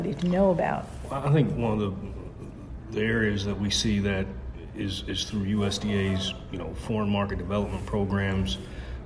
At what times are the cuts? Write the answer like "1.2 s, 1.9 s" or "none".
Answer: none